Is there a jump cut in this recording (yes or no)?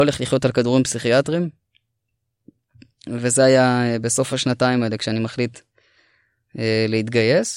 no